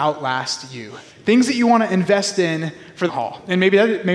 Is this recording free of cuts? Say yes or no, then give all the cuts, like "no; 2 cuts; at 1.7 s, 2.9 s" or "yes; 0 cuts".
no; 2 cuts; at 1.1 s, 3.1 s